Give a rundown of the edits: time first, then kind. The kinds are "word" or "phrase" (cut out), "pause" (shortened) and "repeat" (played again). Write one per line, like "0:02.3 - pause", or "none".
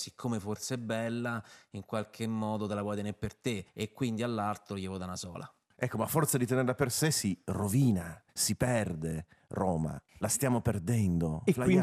0:03.7 - pause
0:08.3 - pause
0:10.1 - pause